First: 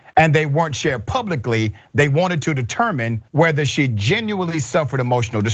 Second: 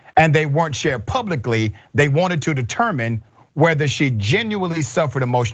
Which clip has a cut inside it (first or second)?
first